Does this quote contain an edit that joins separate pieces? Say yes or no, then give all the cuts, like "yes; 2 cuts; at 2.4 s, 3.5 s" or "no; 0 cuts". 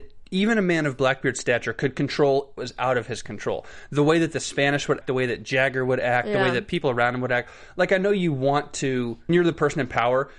yes; 3 cuts; at 2.6 s, 5.0 s, 9.3 s